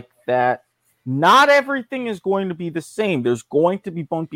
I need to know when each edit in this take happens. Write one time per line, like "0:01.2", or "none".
none

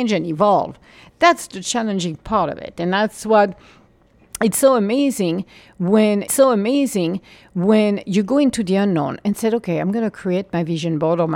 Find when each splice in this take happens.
0:06.3

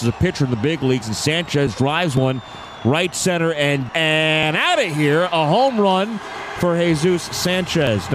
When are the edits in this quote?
0:03.9

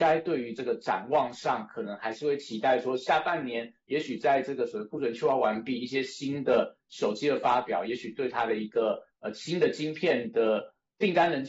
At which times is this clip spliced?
none

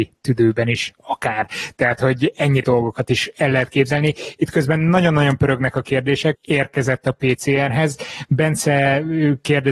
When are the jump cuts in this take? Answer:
0:02.6
0:06.3

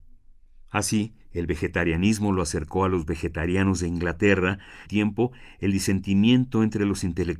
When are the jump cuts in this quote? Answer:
0:01.2
0:04.9

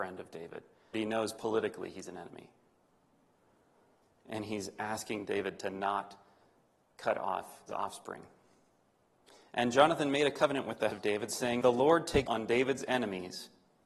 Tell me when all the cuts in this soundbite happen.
0:00.9
0:07.7
0:10.9
0:11.6
0:12.3

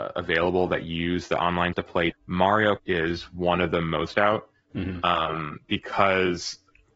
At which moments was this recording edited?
0:01.7
0:02.1
0:02.8
0:04.1

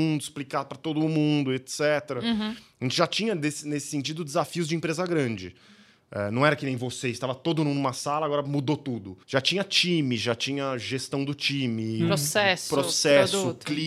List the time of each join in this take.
0:09.2

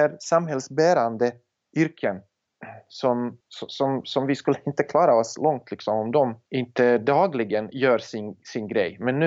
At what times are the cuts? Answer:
0:01.5
0:03.4
0:06.5

